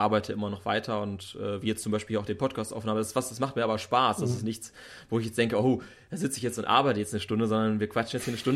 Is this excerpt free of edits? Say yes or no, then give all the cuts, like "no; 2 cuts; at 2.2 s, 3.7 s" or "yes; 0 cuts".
yes; 0 cuts